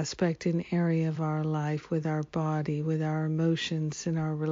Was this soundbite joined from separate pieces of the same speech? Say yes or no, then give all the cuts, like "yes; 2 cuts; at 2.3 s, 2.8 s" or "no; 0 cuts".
no; 0 cuts